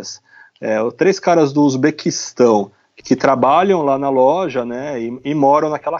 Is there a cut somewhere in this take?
yes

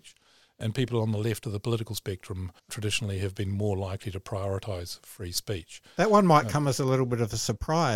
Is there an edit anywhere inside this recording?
yes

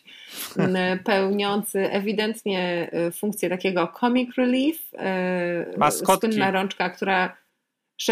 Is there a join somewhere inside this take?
no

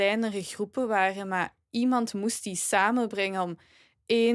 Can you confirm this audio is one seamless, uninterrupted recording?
yes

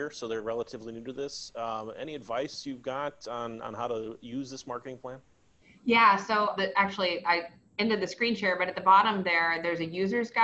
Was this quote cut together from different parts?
yes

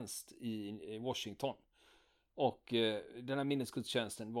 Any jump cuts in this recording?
no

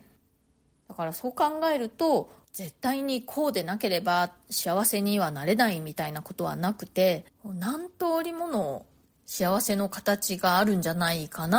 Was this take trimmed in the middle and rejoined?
yes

